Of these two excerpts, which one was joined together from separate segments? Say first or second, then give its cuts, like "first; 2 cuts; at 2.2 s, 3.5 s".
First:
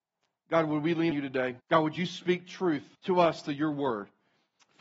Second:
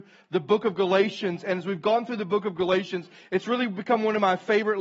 first; 3 cuts; at 1.1 s, 1.6 s, 2.9 s